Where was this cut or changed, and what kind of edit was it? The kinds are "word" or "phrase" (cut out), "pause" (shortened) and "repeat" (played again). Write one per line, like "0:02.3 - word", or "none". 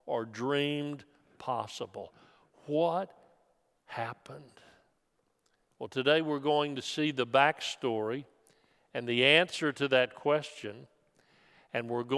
none